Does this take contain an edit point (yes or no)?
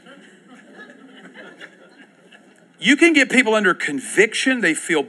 no